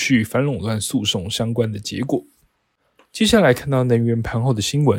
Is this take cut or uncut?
uncut